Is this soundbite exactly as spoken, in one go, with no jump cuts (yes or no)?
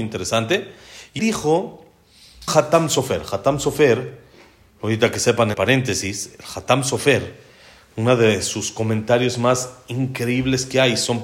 no